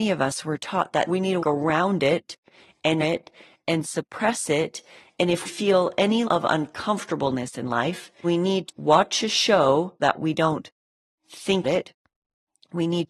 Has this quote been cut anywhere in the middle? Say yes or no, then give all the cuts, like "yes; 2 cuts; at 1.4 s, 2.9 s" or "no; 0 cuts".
yes; 9 cuts; at 1.1 s, 1.4 s, 3.0 s, 5.4 s, 6.3 s, 8.2 s, 8.7 s, 10.0 s, 11.6 s